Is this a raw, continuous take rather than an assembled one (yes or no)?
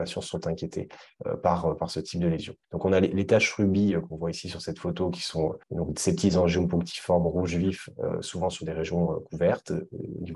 no